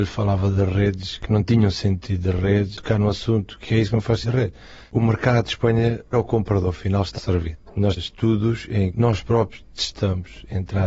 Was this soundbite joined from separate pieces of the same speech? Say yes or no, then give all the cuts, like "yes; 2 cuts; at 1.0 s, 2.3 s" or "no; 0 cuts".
yes; 8 cuts; at 1.2 s, 2.8 s, 3.7 s, 4.2 s, 6.1 s, 7.2 s, 8.0 s, 8.9 s